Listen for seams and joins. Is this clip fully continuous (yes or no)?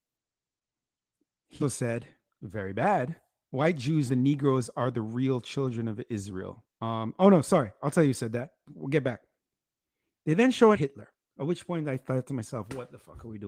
no